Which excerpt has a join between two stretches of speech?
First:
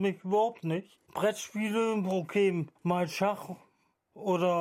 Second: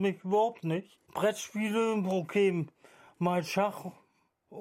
first; 1 cut; at 2.8 s

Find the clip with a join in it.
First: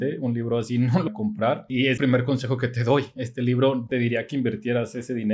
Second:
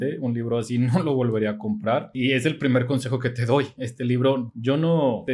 first; 3 cuts; at 1.1 s, 2.0 s, 3.9 s

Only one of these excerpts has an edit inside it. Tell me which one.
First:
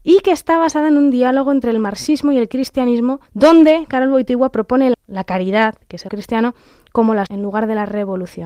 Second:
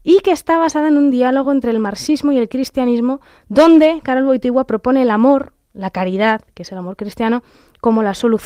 first; 4 cuts; at 3.3 s, 4.9 s, 6.1 s, 7.3 s

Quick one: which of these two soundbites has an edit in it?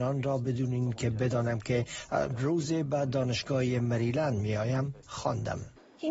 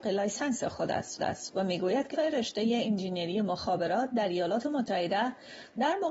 second; 2 cuts; at 1.2 s, 2.1 s

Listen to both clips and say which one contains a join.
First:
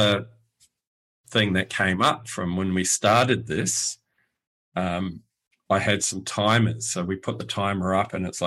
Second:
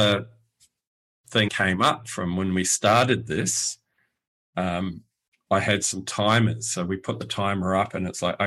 second; 1 cut; at 1.5 s

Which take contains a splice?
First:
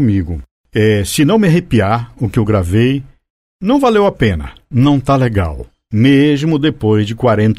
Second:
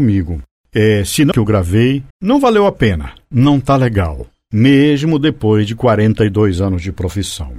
second; 2 cuts; at 1.3 s, 2.1 s

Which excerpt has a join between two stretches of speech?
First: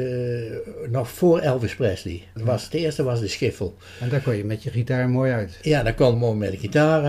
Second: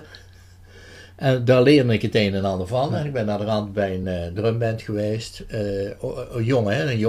first; 2 cuts; at 2.4 s, 6.1 s

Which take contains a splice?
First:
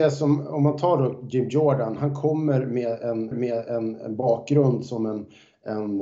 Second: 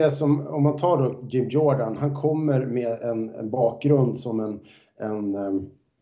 first; 1 cut; at 3.3 s

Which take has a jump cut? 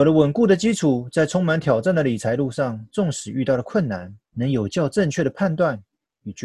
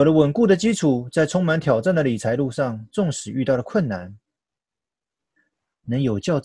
first; 1 cut; at 4.2 s

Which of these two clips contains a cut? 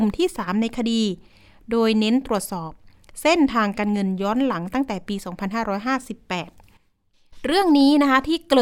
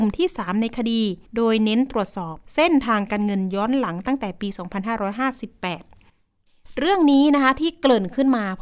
second; 2 cuts; at 1.2 s, 2.5 s

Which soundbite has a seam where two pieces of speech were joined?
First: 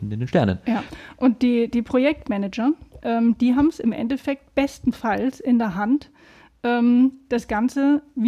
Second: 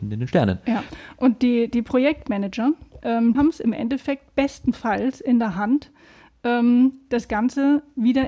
second; 1 cut; at 3.3 s

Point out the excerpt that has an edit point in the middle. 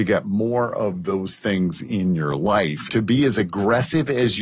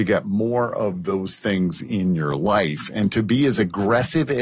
first; 1 cut; at 2.9 s

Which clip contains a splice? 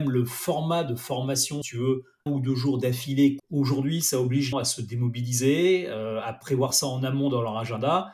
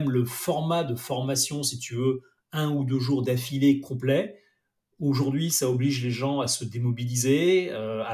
first; 4 cuts; at 1.6 s, 2.3 s, 3.4 s, 4.5 s

